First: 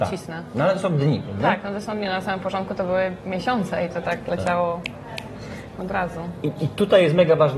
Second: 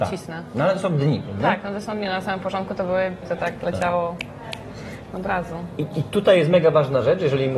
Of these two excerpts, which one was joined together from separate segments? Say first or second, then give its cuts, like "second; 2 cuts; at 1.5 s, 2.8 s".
second; 1 cut; at 3.2 s